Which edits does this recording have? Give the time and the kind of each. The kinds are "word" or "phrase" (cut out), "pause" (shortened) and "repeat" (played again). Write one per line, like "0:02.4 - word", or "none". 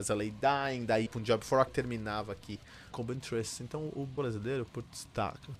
0:01.1 - word
0:01.7 - word
0:02.9 - word
0:04.2 - word